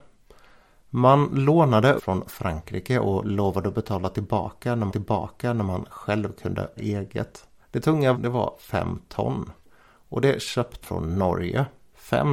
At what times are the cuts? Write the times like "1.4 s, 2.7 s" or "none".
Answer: 2.0 s, 4.9 s, 6.8 s, 7.6 s, 8.1 s, 10.8 s